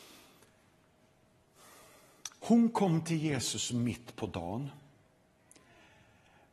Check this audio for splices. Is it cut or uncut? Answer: uncut